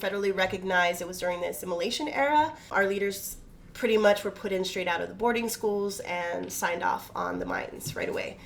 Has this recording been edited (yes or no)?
no